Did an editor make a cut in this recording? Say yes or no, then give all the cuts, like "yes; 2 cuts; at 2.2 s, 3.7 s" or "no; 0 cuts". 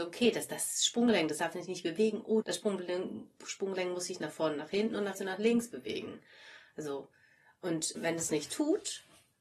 yes; 4 cuts; at 2.4 s, 5.1 s, 7.9 s, 8.3 s